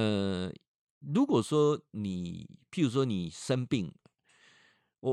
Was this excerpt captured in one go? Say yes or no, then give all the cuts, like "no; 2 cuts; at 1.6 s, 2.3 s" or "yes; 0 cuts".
yes; 0 cuts